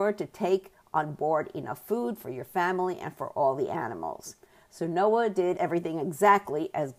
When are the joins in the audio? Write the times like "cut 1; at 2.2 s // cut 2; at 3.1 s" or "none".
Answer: cut 1; at 5.5 s